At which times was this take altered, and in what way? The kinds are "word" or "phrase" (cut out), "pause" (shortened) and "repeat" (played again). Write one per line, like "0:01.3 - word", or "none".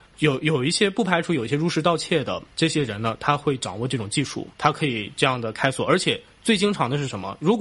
0:02.5 - pause
0:04.5 - pause